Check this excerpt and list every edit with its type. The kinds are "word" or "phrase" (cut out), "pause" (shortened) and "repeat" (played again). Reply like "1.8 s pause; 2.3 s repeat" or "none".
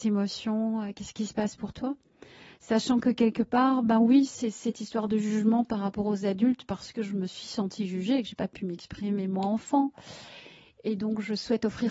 none